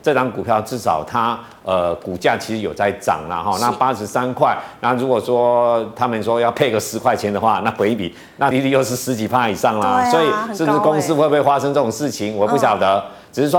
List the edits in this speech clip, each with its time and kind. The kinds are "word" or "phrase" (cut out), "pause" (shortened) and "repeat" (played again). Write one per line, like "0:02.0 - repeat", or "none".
0:08.5 - word